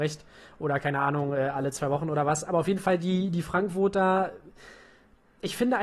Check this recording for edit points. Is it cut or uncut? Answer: uncut